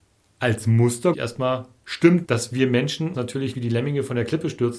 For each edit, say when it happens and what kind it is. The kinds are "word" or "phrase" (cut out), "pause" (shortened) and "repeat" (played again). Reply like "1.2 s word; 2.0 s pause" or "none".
1.1 s word; 2.2 s word; 3.1 s word; 3.5 s word

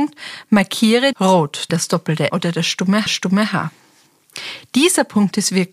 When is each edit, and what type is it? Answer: 1.1 s phrase; 1.7 s phrase; 2.3 s word; 3.1 s repeat

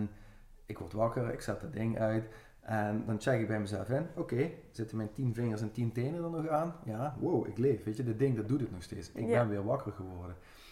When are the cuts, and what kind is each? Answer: none

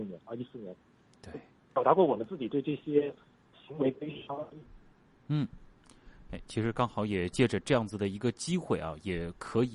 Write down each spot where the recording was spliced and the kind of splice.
none

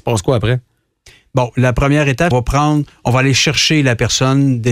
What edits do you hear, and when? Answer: 2.3 s phrase

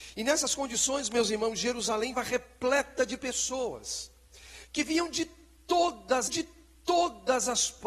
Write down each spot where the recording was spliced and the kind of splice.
2.1 s word; 6.3 s repeat

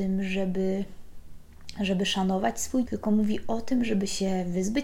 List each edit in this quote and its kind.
2.9 s word

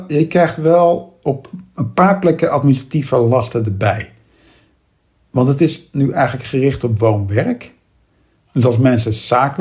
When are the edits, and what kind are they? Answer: none

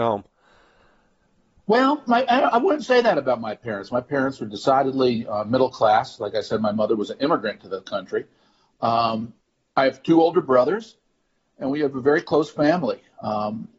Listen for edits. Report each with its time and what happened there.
none

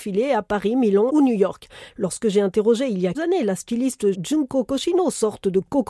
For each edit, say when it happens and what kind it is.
1.1 s word; 3.1 s word; 4.1 s word

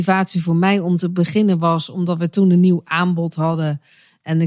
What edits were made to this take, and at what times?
none

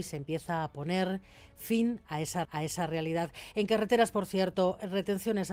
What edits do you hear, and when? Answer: 2.4 s repeat

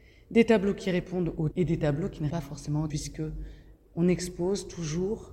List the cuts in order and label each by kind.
1.5 s word; 2.3 s word; 2.9 s word

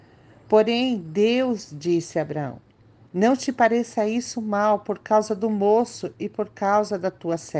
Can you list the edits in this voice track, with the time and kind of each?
none

